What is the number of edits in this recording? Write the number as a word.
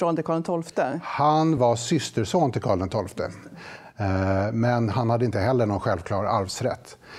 zero